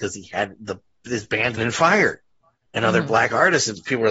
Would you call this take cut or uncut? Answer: cut